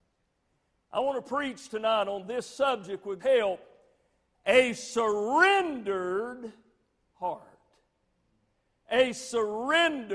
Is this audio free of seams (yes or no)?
no